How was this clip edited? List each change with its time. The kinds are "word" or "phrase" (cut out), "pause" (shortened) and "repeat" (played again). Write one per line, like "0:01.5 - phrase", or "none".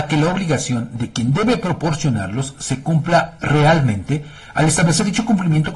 none